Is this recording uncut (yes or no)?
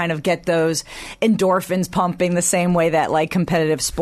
yes